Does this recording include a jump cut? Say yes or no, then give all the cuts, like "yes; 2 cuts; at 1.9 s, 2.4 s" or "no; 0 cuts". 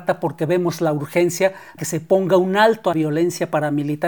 yes; 2 cuts; at 1.8 s, 2.9 s